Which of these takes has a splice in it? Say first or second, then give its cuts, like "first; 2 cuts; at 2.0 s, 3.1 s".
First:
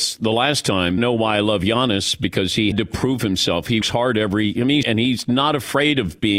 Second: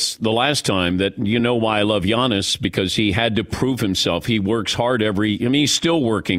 first; 4 cuts; at 1.0 s, 2.7 s, 3.8 s, 4.8 s